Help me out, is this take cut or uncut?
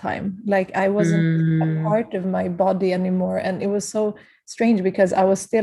uncut